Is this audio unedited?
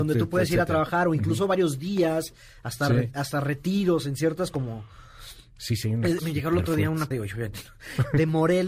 no; 2 cuts; at 6.2 s, 7.1 s

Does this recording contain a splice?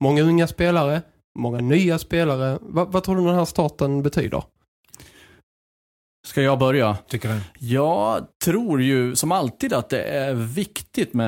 no; 0 cuts

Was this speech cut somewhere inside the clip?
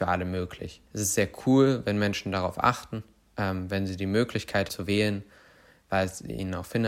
yes; 1 cut; at 4.7 s

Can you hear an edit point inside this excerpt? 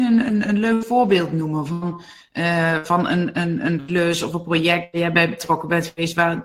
no; 0 cuts

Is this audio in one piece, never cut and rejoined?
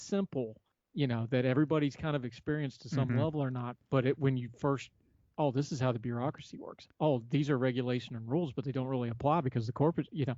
no; 1 cut; at 5.3 s

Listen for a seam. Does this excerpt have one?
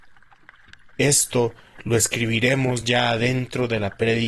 no; 0 cuts

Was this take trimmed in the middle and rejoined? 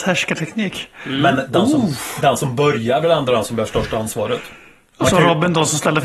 no; 0 cuts

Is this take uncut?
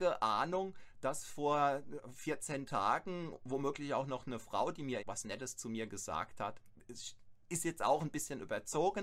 no; 1 cut; at 5.0 s

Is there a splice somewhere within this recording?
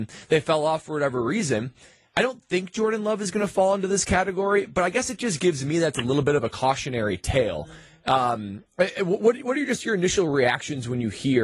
no; 0 cuts

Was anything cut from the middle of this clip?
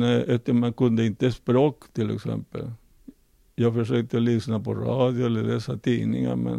no; 0 cuts

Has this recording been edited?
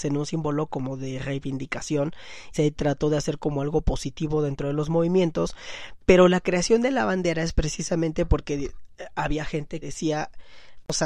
yes; 2 cuts; at 2.5 s, 9.8 s

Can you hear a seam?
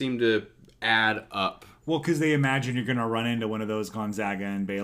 no; 0 cuts

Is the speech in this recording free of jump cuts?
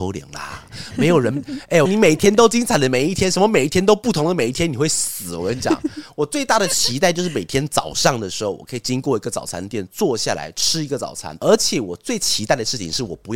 no; 1 cut; at 1.8 s

